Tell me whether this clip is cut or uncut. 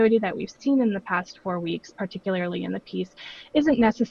uncut